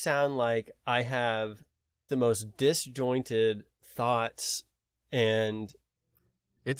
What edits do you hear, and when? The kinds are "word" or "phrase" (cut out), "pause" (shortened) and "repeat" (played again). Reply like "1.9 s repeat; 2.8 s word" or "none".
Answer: 2.1 s word; 4.8 s pause